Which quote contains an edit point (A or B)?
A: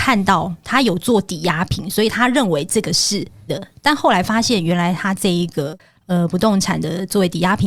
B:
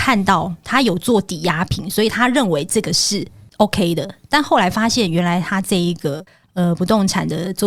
A